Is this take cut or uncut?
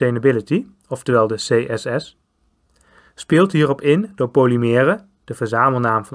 uncut